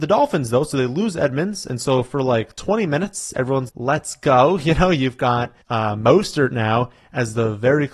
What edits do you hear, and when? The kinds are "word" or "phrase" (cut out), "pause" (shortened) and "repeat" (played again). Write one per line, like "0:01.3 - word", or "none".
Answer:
0:03.7 - word
0:05.6 - pause